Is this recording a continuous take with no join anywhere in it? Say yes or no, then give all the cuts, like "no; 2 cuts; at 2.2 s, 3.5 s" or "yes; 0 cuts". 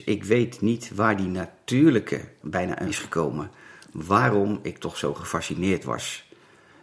no; 2 cuts; at 2.4 s, 2.9 s